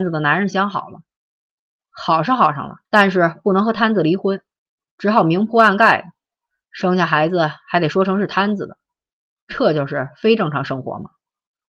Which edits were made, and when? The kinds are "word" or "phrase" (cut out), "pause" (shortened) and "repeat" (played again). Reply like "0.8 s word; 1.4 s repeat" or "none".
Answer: 2.8 s pause